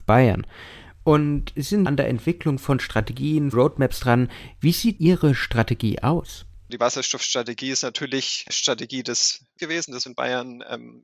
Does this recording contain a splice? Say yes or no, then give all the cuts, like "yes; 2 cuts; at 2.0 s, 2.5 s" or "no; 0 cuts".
yes; 7 cuts; at 1.9 s, 3.5 s, 5.0 s, 6.8 s, 8.5 s, 9.6 s, 10.1 s